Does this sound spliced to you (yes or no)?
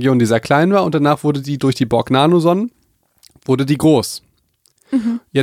no